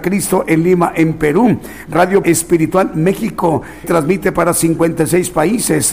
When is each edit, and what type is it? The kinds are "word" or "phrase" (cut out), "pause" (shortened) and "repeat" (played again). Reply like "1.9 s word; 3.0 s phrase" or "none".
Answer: 2.2 s word; 3.8 s word